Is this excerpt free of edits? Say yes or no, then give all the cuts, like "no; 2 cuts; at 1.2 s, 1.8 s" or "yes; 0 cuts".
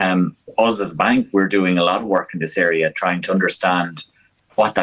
yes; 0 cuts